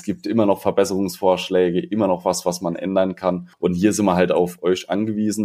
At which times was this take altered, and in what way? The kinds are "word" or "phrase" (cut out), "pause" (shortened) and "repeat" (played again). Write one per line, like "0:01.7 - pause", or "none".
0:03.5 - pause